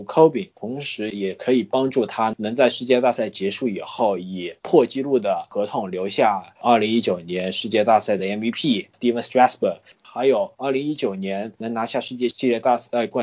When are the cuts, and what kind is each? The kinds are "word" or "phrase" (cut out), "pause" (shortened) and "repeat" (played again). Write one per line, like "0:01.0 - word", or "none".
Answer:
none